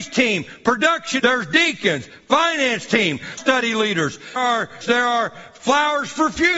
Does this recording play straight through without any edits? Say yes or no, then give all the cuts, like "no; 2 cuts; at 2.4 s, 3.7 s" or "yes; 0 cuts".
no; 4 cuts; at 1.2 s, 3.4 s, 4.4 s, 4.8 s